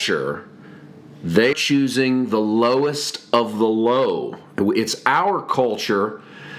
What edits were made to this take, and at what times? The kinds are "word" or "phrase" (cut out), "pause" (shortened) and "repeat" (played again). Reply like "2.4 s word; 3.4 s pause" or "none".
1.5 s word